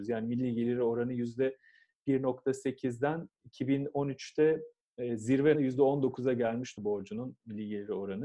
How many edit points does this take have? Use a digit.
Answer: 2